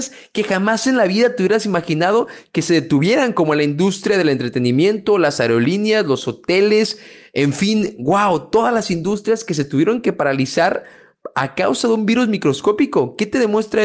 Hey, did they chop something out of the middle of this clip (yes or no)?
no